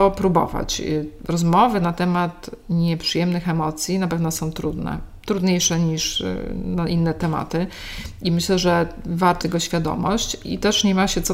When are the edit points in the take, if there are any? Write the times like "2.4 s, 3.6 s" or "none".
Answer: 9.4 s